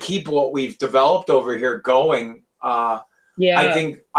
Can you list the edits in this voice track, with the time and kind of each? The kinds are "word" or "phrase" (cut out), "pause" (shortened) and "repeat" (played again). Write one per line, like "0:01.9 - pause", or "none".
none